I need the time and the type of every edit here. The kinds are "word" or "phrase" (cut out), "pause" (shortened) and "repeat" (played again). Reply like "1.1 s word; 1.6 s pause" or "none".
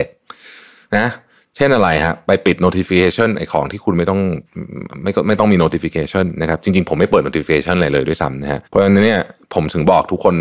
8.7 s pause